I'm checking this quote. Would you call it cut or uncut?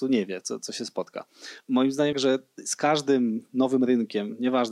cut